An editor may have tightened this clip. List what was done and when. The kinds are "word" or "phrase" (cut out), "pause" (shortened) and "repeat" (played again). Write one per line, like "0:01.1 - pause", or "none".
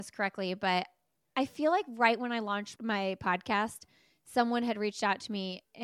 none